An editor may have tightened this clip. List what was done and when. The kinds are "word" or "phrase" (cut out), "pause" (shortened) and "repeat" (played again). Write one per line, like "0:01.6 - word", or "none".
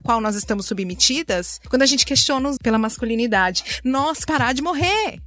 0:02.6 - word
0:04.3 - word